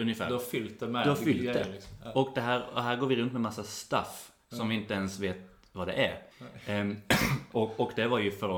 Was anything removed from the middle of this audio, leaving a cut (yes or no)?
yes